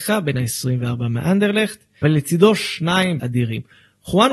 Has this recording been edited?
yes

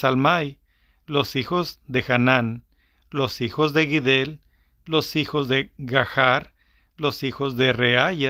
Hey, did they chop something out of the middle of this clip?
no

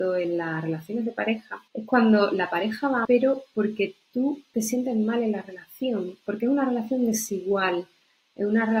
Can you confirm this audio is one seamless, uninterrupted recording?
no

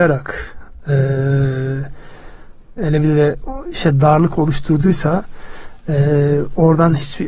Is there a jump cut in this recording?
yes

